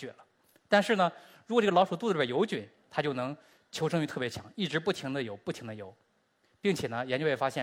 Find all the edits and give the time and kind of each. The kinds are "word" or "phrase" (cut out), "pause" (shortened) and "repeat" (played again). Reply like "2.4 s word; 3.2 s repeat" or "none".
none